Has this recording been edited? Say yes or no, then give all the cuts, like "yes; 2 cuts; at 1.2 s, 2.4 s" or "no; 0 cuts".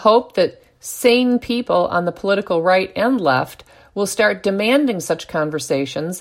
no; 0 cuts